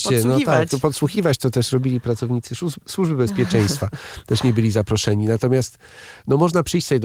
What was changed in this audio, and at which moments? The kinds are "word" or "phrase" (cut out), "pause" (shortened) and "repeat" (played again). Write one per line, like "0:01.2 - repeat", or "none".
none